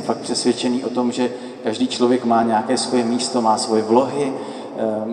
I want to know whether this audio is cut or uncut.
uncut